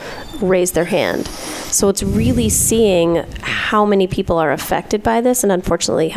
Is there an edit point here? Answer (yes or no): no